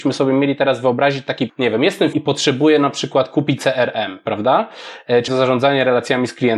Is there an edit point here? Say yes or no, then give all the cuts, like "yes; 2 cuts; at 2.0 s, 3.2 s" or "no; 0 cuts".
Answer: yes; 4 cuts; at 1.5 s, 2.1 s, 3.6 s, 5.3 s